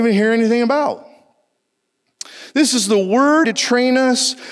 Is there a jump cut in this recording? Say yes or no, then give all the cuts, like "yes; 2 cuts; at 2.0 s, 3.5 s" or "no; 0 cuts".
yes; 1 cut; at 3.4 s